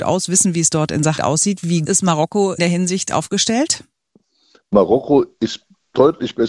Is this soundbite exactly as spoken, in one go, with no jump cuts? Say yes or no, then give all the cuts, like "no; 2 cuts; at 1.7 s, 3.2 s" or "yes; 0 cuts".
no; 3 cuts; at 1.2 s, 1.9 s, 2.6 s